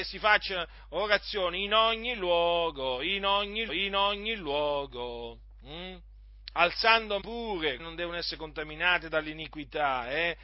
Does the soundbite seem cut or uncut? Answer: cut